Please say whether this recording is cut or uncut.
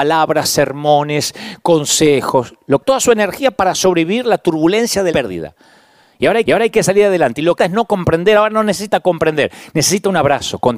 cut